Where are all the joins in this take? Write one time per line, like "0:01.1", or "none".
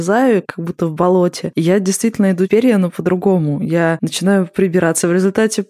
0:02.5